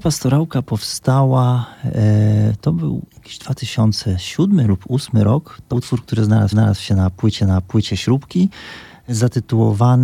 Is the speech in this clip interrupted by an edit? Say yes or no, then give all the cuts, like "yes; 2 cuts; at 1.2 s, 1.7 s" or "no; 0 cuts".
yes; 4 cuts; at 3.1 s, 5.7 s, 6.5 s, 7.4 s